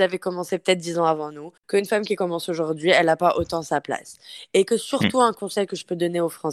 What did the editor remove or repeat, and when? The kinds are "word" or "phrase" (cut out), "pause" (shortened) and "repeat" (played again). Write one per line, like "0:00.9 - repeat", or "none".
0:01.6 - pause